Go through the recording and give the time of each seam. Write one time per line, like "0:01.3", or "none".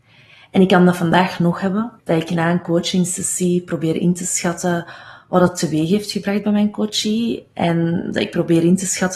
0:02.0